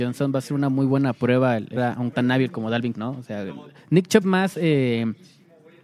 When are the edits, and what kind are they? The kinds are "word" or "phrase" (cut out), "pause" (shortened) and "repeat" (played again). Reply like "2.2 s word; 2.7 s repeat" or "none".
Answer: 1.8 s word; 2.1 s word; 2.9 s word; 4.2 s word